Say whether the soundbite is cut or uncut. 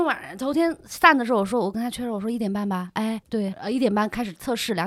cut